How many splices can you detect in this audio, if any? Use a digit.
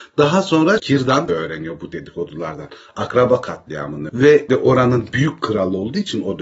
3